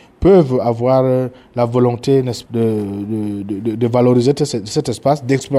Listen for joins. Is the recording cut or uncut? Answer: cut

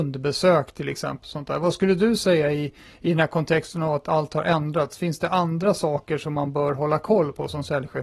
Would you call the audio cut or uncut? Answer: uncut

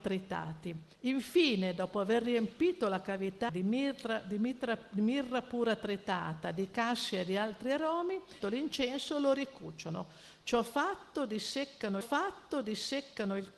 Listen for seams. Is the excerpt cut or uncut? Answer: cut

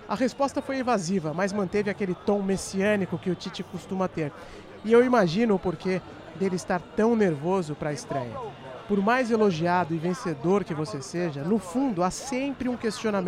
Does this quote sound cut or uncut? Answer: uncut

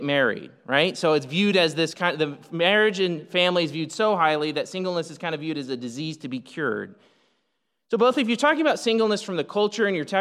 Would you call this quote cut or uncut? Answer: uncut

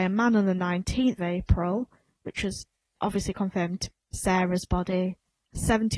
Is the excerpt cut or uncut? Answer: cut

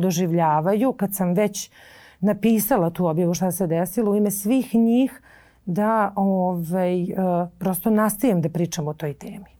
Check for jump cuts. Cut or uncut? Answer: uncut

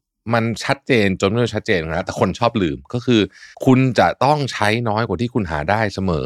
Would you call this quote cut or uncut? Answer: cut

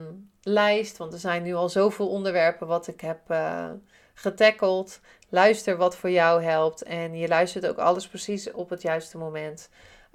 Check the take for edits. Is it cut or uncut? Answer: uncut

